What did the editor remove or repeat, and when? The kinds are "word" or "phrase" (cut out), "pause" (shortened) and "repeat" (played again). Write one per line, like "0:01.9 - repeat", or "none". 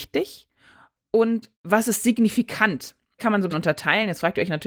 0:03.2 - word
0:03.5 - word

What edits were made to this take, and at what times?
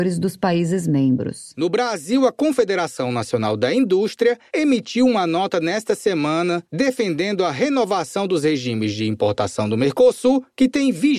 none

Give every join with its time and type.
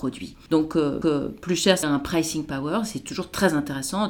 0:01.0 - repeat
0:01.8 - phrase

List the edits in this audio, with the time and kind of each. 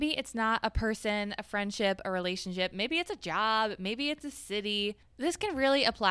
none

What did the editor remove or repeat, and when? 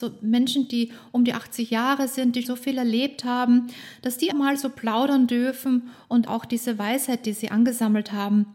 0:02.4 - word
0:04.3 - word
0:06.3 - word

